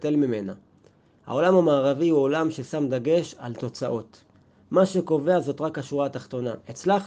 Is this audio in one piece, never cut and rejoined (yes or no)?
yes